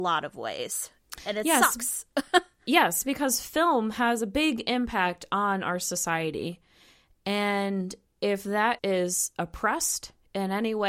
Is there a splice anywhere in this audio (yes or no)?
yes